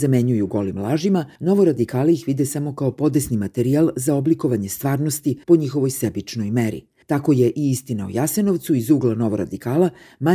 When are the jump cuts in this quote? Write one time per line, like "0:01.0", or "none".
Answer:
0:01.4
0:05.4
0:07.0

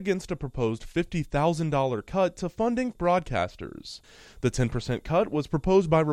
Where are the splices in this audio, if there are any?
0:02.9

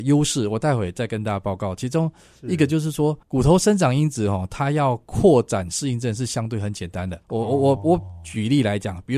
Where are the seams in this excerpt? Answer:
0:03.2
0:07.2

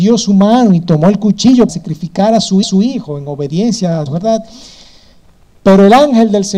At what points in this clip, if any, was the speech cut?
0:01.7
0:02.6
0:04.1

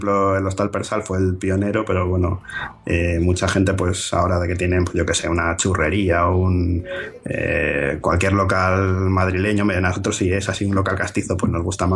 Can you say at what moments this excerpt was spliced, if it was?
none

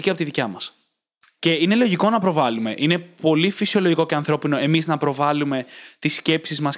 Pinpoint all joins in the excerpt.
none

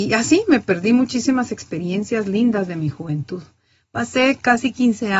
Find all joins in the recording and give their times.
none

